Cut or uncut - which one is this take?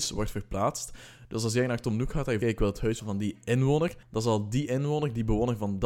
cut